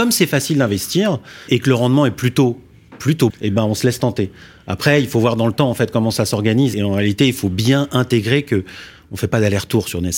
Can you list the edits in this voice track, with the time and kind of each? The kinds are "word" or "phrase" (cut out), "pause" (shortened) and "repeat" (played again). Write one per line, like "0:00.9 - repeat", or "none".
0:01.5 - word
0:03.3 - word
0:06.7 - word